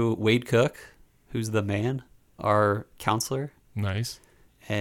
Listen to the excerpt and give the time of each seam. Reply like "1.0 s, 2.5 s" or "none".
2.4 s